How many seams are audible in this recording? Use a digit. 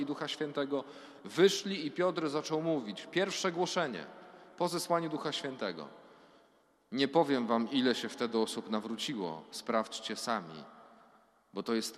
0